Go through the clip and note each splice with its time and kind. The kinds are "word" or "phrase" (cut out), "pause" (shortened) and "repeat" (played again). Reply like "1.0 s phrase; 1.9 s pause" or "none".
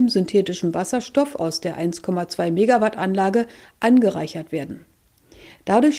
none